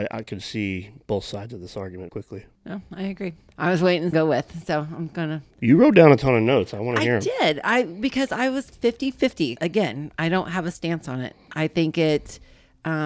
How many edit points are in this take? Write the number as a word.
six